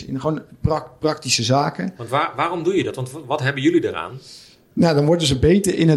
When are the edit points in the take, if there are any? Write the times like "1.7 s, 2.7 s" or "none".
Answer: none